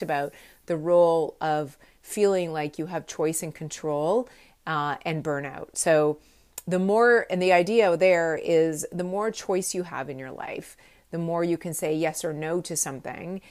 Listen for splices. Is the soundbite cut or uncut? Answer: uncut